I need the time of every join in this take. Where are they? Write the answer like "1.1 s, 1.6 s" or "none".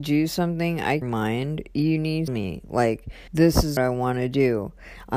1.0 s, 2.3 s, 3.3 s, 3.8 s